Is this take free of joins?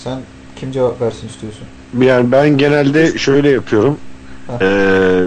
yes; 0 cuts

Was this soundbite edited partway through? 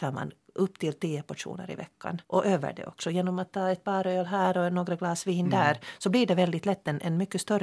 yes; 1 cut; at 2.2 s

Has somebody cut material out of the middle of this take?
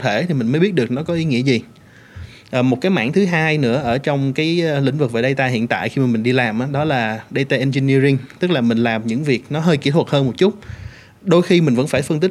no; 0 cuts

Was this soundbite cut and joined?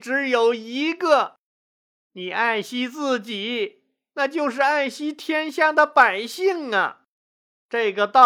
no; 0 cuts

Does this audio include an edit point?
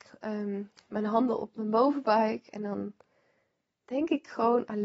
no; 0 cuts

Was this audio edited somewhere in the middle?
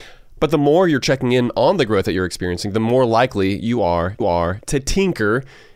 yes; 1 cut; at 4.2 s

